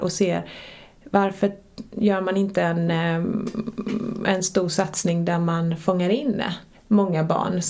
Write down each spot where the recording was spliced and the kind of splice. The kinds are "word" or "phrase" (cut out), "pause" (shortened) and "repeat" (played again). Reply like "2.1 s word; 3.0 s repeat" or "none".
6.7 s pause